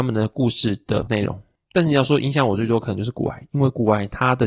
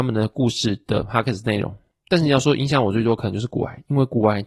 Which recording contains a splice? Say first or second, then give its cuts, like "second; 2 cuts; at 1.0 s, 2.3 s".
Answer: first; 1 cut; at 1.1 s